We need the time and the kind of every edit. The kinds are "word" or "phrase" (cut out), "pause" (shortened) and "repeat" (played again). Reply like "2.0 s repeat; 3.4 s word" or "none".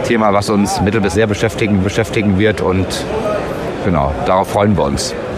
1.1 s phrase; 1.8 s repeat